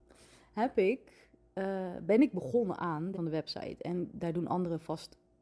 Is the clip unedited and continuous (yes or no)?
no